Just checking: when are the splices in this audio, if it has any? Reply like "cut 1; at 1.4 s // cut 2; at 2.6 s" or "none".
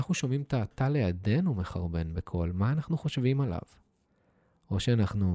none